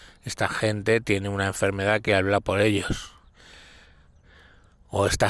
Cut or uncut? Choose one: uncut